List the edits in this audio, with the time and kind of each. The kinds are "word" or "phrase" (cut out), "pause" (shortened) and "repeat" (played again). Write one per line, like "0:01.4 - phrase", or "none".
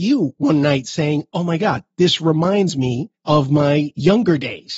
0:03.1 - pause

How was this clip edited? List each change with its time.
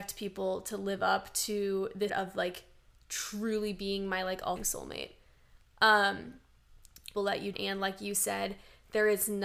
0:02.1 - word
0:04.6 - word
0:07.1 - phrase
0:07.5 - word

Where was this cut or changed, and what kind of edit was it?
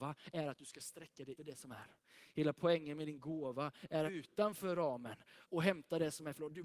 0:01.4 - word
0:04.1 - phrase
0:05.4 - pause

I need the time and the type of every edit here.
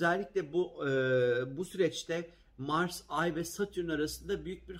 none

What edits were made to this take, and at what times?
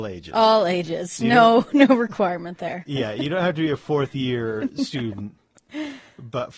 none

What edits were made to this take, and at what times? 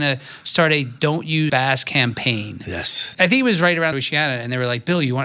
0:01.5 - word
0:03.9 - phrase

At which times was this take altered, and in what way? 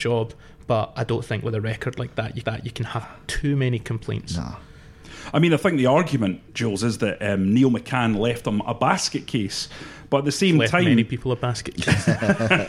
0:02.4 - repeat
0:06.5 - pause

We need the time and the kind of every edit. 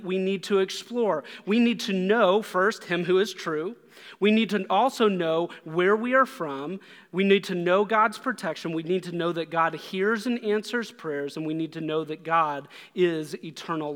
none

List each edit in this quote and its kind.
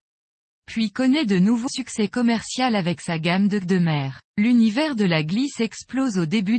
0:01.7 - word
0:03.6 - word
0:04.3 - pause

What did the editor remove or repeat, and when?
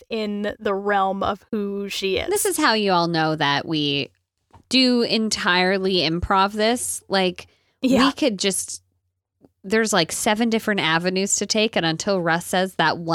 none

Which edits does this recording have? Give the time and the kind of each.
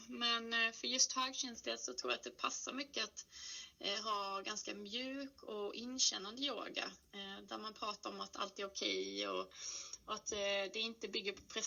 none

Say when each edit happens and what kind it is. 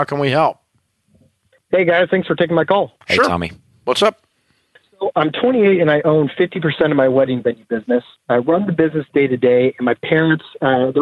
none

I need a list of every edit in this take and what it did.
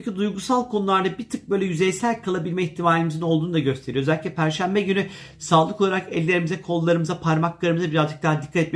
none

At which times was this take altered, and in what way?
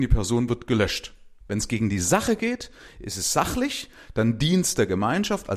none

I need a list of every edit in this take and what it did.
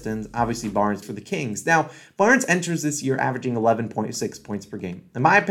0:01.0 - word

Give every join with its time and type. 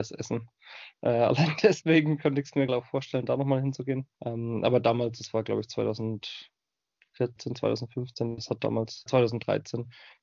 0:02.7 - word
0:04.1 - pause
0:09.1 - word

